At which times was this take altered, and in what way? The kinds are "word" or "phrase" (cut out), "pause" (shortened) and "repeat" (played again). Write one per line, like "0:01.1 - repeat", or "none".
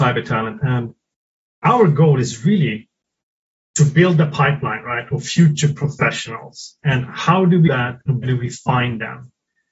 0:07.7 - word
0:08.2 - word